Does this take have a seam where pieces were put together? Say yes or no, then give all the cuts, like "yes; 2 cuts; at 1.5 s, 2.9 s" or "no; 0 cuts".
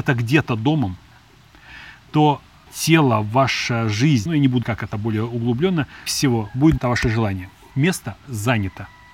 yes; 5 cuts; at 2.7 s, 4.3 s, 4.6 s, 6.1 s, 6.8 s